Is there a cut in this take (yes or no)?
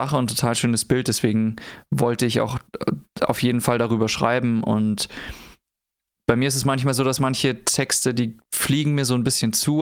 no